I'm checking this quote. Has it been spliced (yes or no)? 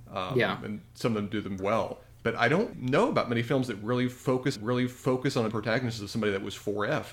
yes